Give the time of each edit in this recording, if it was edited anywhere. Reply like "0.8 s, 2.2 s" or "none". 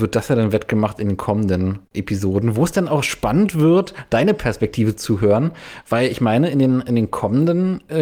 1.8 s